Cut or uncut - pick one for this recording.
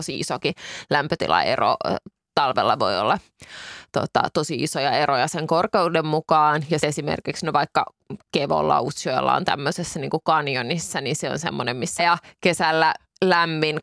cut